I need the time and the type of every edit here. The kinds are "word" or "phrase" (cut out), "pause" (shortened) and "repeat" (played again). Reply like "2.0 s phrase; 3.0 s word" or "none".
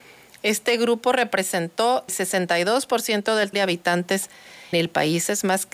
2.1 s word; 3.5 s word; 4.7 s word